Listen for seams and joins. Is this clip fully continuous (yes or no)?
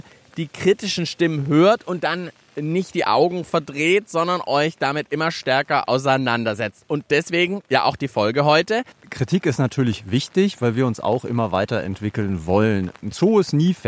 yes